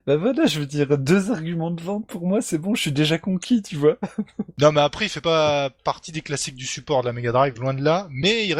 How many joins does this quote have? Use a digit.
0